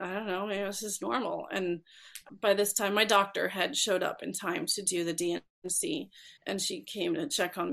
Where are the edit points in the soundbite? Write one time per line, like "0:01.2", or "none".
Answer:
0:02.3
0:06.4

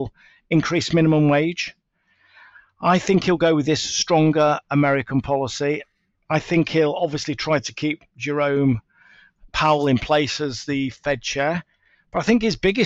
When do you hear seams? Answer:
none

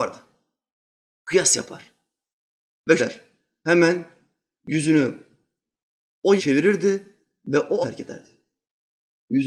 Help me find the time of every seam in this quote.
0:03.0
0:06.4
0:07.8

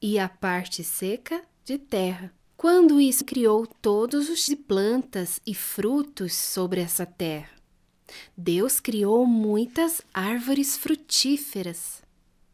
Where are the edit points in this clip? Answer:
0:02.5
0:03.2
0:04.5

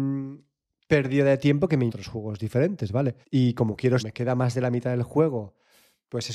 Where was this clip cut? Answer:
0:01.9
0:03.2
0:04.0

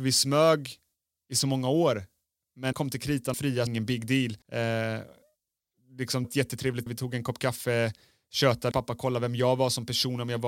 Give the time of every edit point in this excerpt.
0:02.7
0:03.3
0:03.7
0:04.4
0:06.2
0:06.9
0:08.7

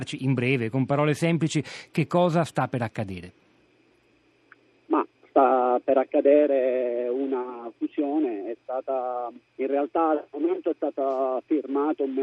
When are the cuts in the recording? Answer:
0:09.5

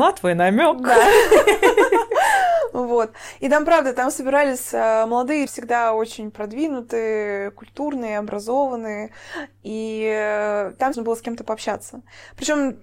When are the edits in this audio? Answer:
0:05.5
0:10.9

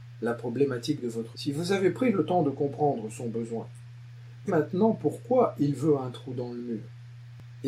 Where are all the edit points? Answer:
0:01.3
0:04.5

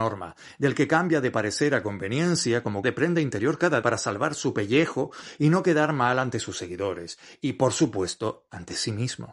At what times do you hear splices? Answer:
0:02.8
0:03.8

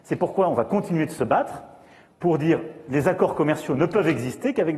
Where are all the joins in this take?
none

